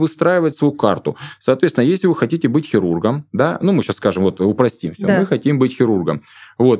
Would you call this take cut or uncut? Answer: uncut